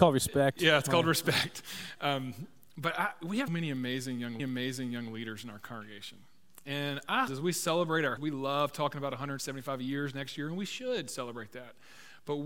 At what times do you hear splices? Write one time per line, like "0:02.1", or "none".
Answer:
0:03.5
0:04.4
0:07.3
0:08.2